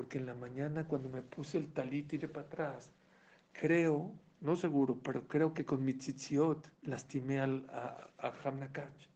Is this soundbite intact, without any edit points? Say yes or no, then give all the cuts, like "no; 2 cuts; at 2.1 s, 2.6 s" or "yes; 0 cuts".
no; 2 cuts; at 2.2 s, 6.7 s